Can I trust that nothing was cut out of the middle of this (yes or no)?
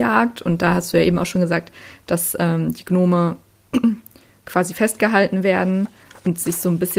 yes